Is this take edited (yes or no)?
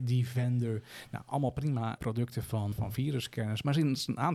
yes